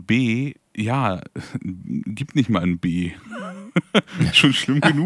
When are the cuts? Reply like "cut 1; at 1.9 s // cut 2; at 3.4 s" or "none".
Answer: none